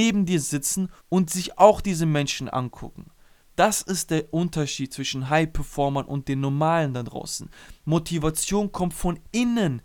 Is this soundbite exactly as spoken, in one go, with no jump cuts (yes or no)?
no